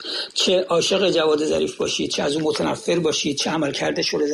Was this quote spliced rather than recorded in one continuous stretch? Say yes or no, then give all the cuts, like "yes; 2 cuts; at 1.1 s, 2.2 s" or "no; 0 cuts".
no; 0 cuts